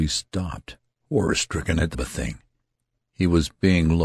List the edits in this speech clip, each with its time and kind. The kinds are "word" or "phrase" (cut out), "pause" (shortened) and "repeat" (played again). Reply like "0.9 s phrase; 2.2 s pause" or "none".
1.9 s word